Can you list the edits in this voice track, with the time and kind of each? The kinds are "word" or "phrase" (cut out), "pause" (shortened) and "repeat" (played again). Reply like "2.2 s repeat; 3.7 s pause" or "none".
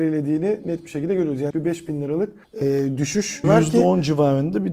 1.5 s word; 2.4 s pause; 3.4 s word